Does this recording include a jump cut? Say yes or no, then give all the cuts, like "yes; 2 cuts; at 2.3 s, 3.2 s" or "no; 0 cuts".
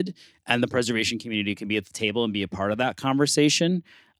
no; 0 cuts